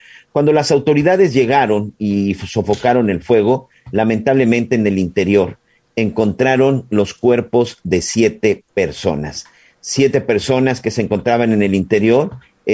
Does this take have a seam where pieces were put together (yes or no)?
no